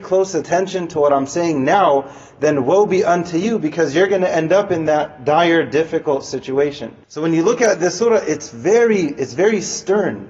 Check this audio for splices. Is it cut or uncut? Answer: cut